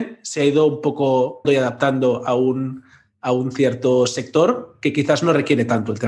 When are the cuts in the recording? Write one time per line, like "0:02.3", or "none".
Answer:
0:01.4